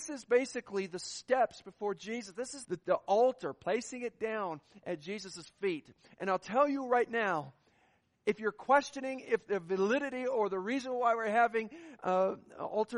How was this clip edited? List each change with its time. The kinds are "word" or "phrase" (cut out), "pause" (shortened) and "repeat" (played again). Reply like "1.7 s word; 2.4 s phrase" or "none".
2.6 s word